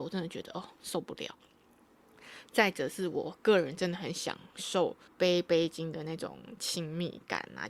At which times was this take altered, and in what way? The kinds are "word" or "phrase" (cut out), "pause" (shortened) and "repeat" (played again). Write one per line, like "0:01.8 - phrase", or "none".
0:05.1 - pause